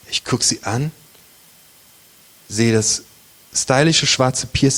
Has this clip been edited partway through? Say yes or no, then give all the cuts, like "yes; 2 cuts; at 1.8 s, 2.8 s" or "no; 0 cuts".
no; 0 cuts